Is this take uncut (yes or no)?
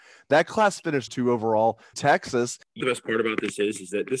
no